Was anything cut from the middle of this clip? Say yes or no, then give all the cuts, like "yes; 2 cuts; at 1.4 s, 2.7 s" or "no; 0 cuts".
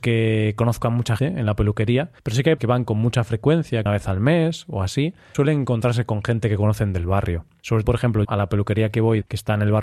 yes; 7 cuts; at 1.2 s, 2.2 s, 2.6 s, 3.9 s, 5.3 s, 7.8 s, 8.2 s